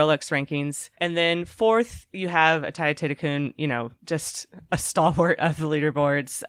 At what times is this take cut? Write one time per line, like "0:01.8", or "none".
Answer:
0:00.9
0:04.0